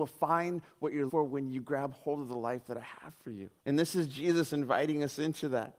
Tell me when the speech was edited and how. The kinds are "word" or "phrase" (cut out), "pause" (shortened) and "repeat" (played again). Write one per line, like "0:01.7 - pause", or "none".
0:01.1 - word
0:03.6 - pause